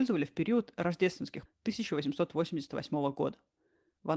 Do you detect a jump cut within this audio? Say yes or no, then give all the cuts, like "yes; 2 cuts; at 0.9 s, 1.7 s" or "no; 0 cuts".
yes; 1 cut; at 1.5 s